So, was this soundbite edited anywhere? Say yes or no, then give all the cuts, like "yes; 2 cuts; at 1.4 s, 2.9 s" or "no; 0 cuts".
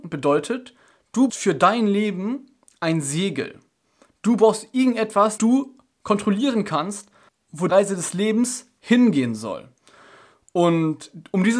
yes; 3 cuts; at 1.3 s, 5.4 s, 7.7 s